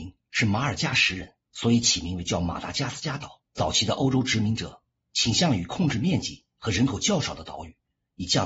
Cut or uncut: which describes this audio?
cut